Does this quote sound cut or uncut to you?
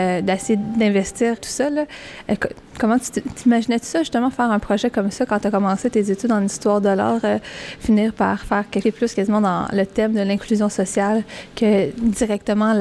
cut